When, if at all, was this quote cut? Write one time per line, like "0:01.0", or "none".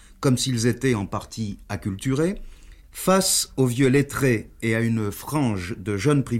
none